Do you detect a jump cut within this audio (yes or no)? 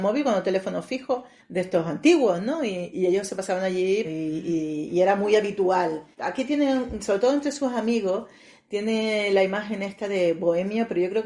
yes